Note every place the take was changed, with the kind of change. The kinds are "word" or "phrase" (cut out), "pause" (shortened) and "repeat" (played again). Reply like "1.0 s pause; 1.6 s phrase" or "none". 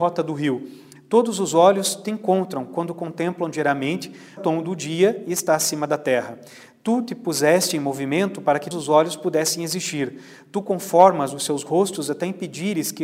4.4 s phrase; 8.7 s word